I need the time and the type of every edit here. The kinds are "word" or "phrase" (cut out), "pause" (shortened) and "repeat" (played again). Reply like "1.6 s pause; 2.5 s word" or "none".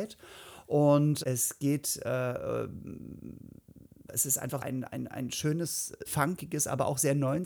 1.2 s word; 4.1 s word; 4.6 s word; 6.1 s word